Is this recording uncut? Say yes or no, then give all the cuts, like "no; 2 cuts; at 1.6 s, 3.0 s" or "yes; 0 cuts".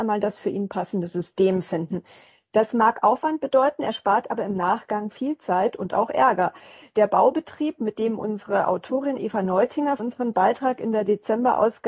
no; 1 cut; at 10.0 s